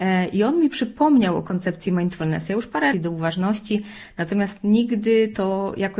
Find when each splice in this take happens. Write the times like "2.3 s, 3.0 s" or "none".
2.9 s